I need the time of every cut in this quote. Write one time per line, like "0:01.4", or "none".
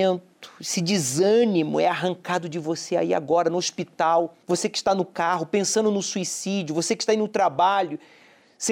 0:04.4